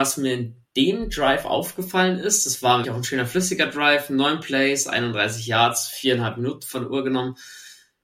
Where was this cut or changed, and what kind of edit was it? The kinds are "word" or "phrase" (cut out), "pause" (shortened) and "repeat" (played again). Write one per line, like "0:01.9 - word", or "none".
0:02.8 - word